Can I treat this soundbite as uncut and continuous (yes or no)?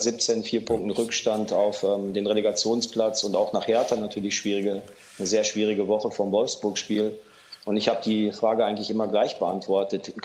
yes